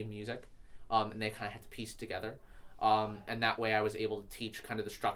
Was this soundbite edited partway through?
no; 0 cuts

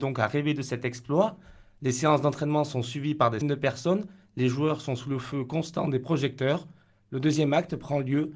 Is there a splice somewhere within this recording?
yes; 1 cut; at 3.4 s

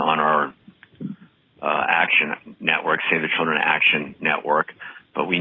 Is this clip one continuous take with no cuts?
yes; 0 cuts

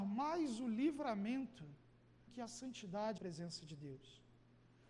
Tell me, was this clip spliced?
yes; 2 cuts; at 2.3 s, 3.2 s

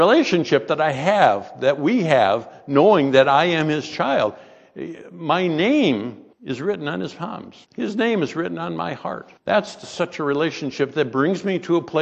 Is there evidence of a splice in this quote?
yes; 3 cuts; at 6.3 s, 7.6 s, 9.4 s

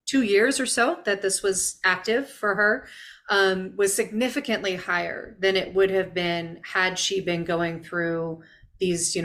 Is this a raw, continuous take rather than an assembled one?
yes; 0 cuts

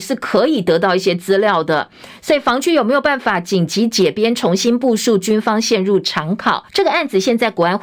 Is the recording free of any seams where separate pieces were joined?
no; 1 cut; at 6.7 s

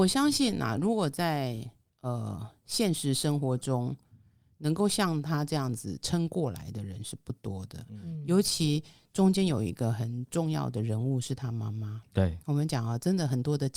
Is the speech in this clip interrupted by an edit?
no; 0 cuts

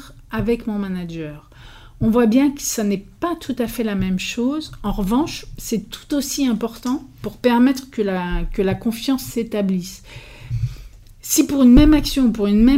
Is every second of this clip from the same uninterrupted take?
yes; 0 cuts

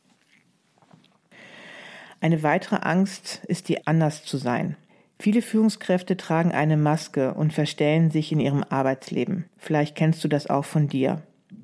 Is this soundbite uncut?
no; 3 cuts; at 3.8 s, 4.9 s, 9.5 s

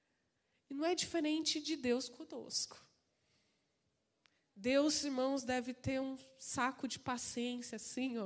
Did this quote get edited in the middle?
no; 0 cuts

